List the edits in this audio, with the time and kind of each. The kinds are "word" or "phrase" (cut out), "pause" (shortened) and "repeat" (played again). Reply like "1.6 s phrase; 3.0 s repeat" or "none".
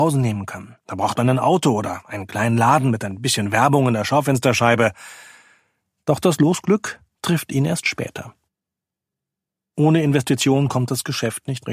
none